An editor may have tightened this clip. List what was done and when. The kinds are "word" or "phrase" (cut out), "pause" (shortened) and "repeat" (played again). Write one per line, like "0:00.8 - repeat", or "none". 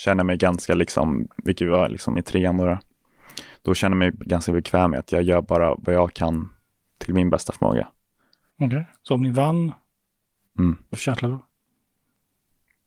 0:02.2 - word
0:10.9 - word